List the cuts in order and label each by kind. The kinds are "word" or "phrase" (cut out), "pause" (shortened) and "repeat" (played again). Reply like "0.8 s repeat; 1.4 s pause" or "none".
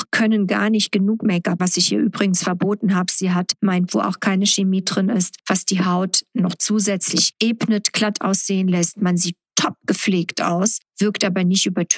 1.6 s word; 3.9 s word